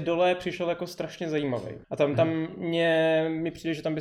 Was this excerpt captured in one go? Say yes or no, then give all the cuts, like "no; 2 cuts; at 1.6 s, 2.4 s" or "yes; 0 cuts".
no; 1 cut; at 1.8 s